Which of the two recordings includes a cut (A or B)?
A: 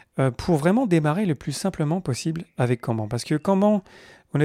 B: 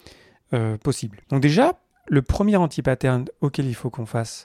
B